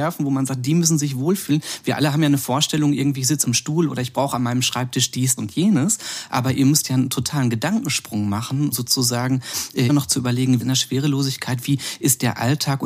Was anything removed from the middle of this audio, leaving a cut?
yes; 5 cuts; at 3.4 s, 5.4 s, 8.7 s, 9.9 s, 10.6 s

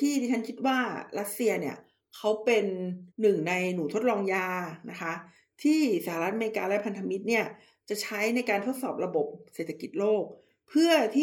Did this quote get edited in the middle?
yes; 1 cut; at 3.1 s

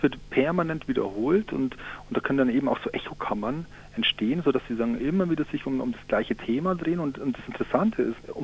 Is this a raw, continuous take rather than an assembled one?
yes; 0 cuts

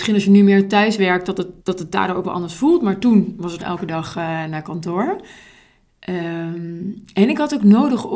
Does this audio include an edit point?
yes; 2 cuts; at 1.6 s, 3.6 s

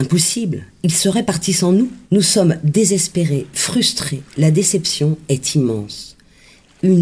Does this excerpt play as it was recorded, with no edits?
no; 1 cut; at 2.0 s

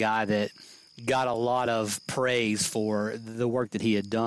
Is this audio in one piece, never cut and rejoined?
yes; 0 cuts

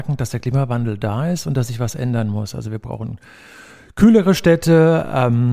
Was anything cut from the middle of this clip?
no; 0 cuts

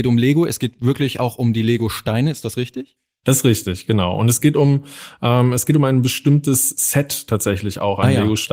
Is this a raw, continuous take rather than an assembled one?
yes; 0 cuts

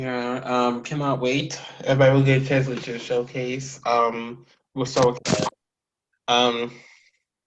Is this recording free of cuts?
yes; 0 cuts

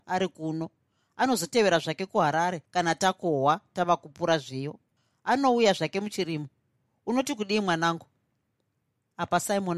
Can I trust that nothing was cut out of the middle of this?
yes; 0 cuts

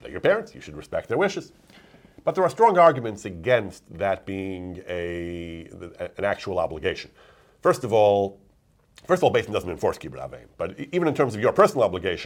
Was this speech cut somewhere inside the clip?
no; 0 cuts

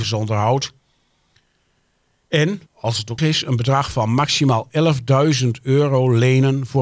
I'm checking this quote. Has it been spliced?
yes; 2 cuts; at 2.7 s, 3.2 s

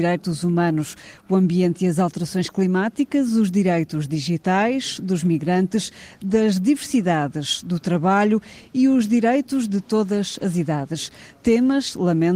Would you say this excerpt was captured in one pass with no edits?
yes; 0 cuts

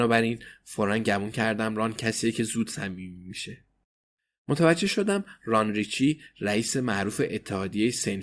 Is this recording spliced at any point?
no; 0 cuts

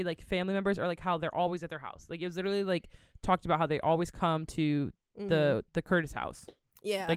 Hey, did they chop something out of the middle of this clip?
no; 0 cuts

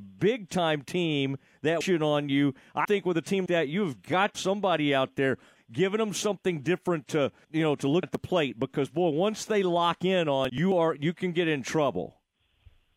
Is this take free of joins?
no; 8 cuts; at 1.8 s, 2.8 s, 3.5 s, 4.3 s, 5.6 s, 7.4 s, 8.0 s, 10.5 s

